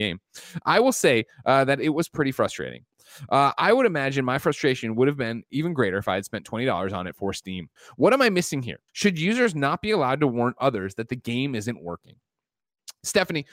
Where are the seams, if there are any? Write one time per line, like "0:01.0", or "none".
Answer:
0:07.8
0:08.9